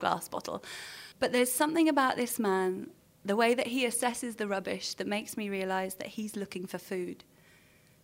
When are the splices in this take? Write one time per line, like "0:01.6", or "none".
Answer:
0:01.1
0:03.0